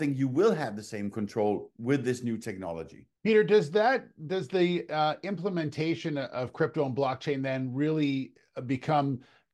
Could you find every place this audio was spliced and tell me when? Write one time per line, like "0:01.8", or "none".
0:03.2